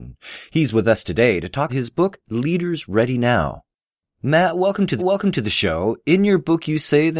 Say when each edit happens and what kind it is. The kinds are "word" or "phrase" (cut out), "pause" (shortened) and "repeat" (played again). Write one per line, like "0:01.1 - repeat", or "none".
0:01.7 - word
0:05.0 - repeat